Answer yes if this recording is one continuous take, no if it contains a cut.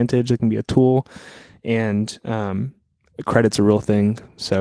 yes